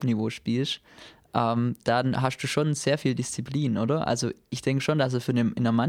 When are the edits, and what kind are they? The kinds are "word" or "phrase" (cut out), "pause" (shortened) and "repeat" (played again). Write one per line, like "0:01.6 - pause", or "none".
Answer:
none